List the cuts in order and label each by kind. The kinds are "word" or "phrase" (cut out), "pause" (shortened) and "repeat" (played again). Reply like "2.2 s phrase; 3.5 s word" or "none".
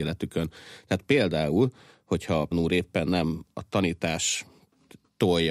2.5 s word